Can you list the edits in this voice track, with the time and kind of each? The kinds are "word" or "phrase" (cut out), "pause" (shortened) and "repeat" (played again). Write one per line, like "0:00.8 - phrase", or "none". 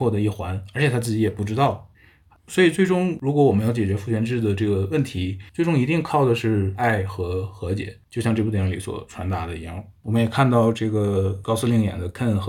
none